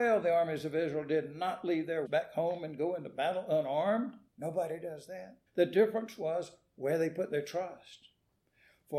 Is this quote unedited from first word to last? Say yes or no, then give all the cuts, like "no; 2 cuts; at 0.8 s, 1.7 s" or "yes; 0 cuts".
no; 3 cuts; at 2.1 s, 4.3 s, 5.5 s